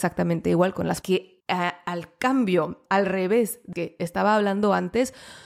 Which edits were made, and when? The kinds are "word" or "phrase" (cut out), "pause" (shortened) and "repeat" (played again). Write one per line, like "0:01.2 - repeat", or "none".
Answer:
0:01.0 - word
0:01.4 - pause
0:02.9 - word
0:03.7 - word